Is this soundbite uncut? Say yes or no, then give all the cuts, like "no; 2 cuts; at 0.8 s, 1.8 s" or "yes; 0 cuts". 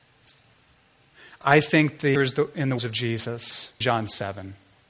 no; 3 cuts; at 2.1 s, 2.8 s, 3.8 s